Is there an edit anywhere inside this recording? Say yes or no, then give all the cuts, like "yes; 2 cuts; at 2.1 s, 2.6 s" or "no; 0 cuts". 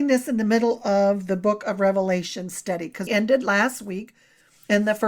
yes; 1 cut; at 3.1 s